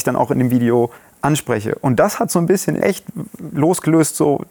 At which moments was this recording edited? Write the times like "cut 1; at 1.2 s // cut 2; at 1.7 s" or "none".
cut 1; at 1.0 s // cut 2; at 2.8 s